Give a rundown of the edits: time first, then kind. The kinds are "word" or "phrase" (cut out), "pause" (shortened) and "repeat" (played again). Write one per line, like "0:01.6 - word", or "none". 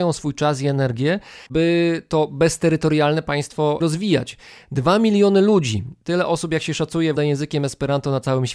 0:01.5 - pause
0:03.8 - word
0:07.2 - word